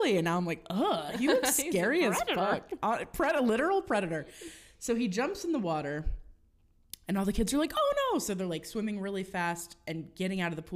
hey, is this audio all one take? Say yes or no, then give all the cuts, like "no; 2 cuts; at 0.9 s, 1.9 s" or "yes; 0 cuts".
yes; 0 cuts